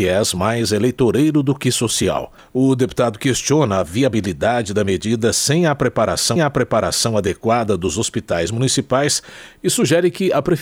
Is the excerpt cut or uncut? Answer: cut